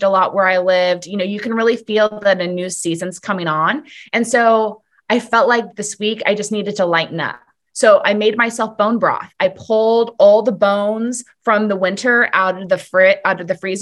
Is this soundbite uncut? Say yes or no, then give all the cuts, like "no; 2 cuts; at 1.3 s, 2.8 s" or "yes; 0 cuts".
yes; 0 cuts